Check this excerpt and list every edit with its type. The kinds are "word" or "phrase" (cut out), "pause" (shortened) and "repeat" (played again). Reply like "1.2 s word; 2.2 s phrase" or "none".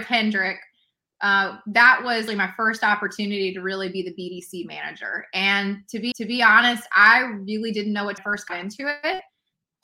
2.3 s word; 6.1 s repeat; 8.2 s phrase